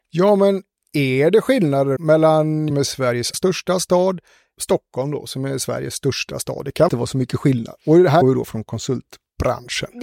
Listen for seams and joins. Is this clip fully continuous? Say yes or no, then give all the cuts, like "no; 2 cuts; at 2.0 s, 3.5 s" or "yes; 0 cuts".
no; 6 cuts; at 2.0 s, 2.7 s, 3.3 s, 4.5 s, 6.9 s, 8.2 s